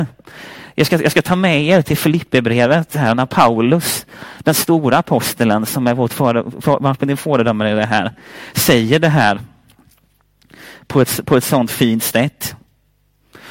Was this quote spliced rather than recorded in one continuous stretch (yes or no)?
no